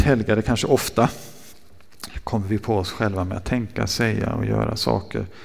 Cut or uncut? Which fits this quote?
uncut